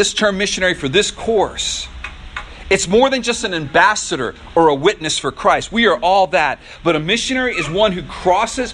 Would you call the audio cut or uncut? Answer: uncut